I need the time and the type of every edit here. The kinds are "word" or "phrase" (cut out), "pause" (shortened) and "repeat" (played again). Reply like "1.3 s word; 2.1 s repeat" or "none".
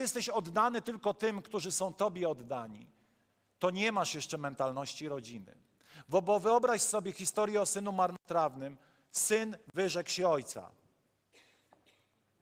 none